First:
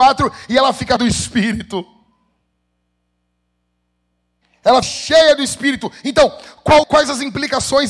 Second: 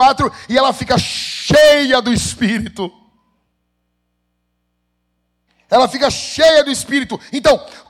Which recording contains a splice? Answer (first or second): first